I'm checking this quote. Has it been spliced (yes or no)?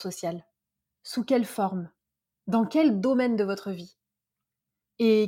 no